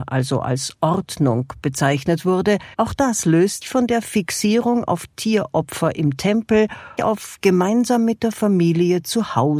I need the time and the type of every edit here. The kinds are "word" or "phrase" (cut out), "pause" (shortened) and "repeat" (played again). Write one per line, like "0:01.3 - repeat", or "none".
0:02.7 - pause
0:03.6 - word
0:07.0 - phrase